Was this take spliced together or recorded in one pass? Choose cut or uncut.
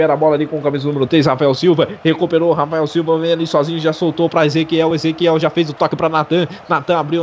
uncut